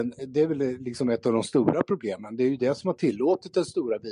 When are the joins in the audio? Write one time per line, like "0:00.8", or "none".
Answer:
none